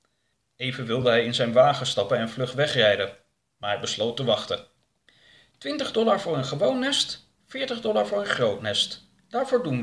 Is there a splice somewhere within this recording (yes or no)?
no